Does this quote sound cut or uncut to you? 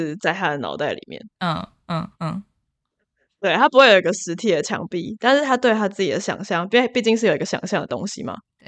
cut